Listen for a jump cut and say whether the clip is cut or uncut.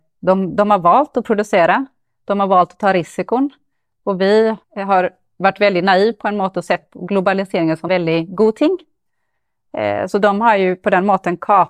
cut